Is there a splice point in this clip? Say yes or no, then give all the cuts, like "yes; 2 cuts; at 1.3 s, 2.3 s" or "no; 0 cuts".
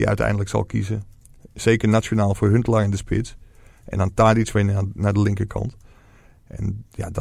no; 0 cuts